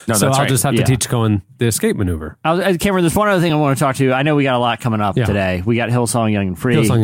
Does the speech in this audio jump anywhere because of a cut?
no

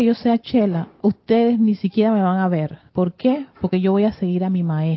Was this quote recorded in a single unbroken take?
no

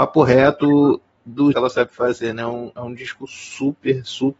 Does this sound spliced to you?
yes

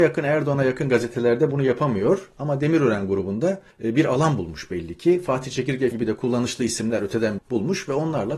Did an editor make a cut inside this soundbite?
yes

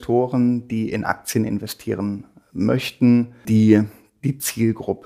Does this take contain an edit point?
no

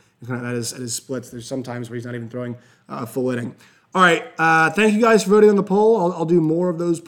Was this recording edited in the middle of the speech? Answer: no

